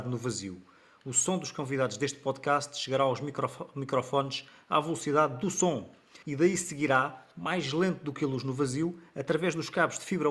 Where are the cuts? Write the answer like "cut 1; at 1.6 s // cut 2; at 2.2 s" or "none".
cut 1; at 6.2 s